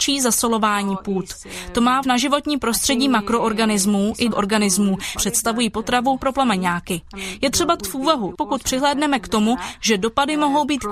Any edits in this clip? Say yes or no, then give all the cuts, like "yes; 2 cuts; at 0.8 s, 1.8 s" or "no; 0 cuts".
yes; 6 cuts; at 2.0 s, 4.3 s, 5.2 s, 6.2 s, 7.8 s, 8.3 s